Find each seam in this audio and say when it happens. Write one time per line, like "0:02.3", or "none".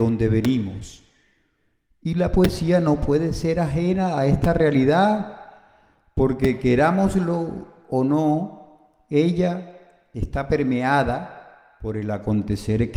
none